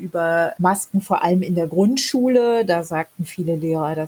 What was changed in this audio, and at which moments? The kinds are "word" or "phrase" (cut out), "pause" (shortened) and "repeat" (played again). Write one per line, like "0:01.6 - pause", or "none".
none